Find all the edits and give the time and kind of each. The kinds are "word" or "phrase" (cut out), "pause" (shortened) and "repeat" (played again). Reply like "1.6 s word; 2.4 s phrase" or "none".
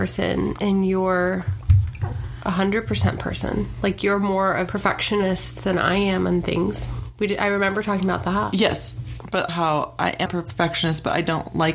4.7 s word; 9.5 s word; 10.3 s word